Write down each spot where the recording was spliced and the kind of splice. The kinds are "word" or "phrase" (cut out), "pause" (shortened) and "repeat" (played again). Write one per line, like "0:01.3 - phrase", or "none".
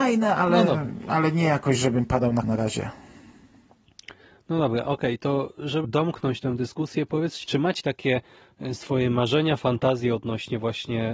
0:02.4 - word
0:05.8 - word
0:07.4 - word
0:07.8 - word